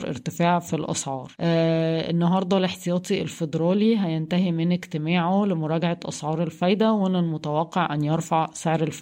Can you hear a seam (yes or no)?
yes